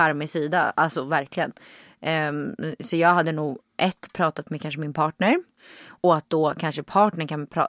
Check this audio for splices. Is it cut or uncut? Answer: uncut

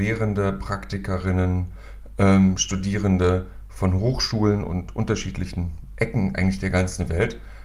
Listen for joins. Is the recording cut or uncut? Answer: uncut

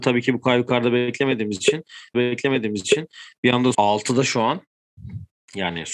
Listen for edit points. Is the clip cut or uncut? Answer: cut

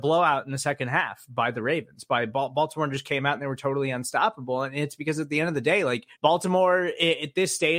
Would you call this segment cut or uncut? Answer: cut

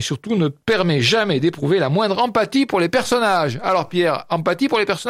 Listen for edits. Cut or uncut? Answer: uncut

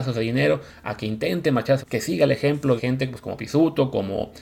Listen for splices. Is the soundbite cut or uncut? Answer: cut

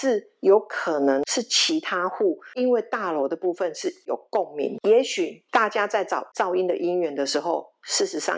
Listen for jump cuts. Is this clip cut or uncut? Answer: cut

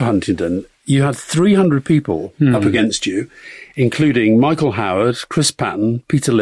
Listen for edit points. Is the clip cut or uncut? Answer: uncut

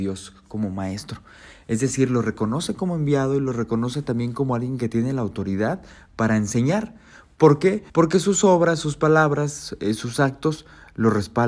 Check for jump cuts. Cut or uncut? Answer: cut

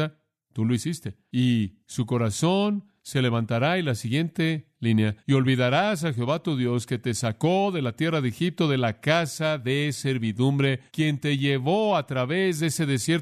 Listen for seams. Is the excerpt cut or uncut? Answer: cut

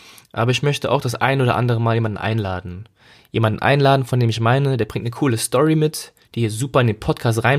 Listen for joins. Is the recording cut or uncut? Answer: uncut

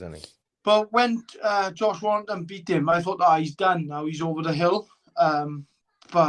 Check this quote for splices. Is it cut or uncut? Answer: uncut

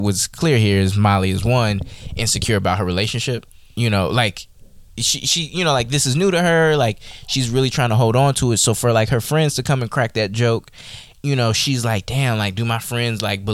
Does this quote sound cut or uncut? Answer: uncut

